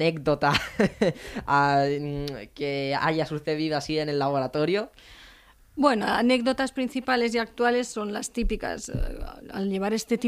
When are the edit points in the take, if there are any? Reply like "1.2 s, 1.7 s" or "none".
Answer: none